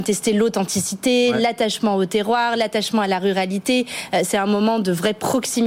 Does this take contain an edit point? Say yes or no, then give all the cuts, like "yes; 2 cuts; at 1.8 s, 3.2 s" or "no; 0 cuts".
no; 0 cuts